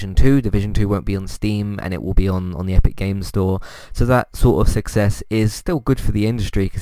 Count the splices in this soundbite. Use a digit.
0